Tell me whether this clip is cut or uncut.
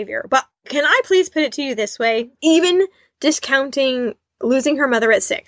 uncut